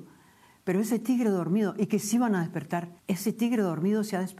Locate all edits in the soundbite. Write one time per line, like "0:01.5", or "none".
0:03.0

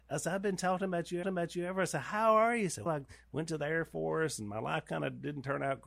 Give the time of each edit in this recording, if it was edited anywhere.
0:01.2
0:02.9

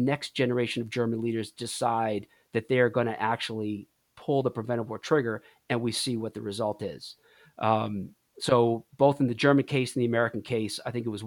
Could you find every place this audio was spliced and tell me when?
none

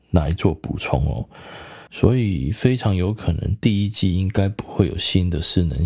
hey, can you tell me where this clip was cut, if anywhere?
0:01.9

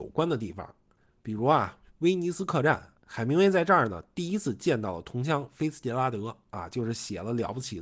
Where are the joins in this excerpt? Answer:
0:03.0

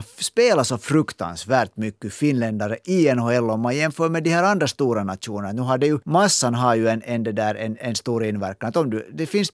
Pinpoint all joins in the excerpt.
none

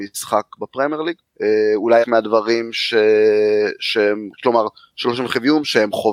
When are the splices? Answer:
0:02.0
0:04.3

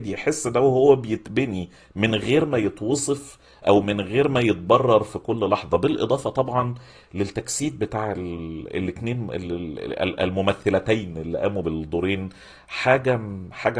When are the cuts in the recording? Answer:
none

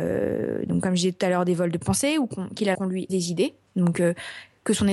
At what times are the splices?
0:02.7
0:03.1

